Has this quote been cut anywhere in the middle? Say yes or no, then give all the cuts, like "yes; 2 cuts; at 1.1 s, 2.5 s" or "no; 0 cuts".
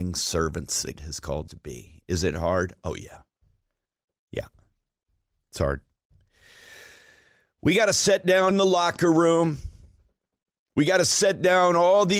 yes; 3 cuts; at 1.0 s, 1.5 s, 8.5 s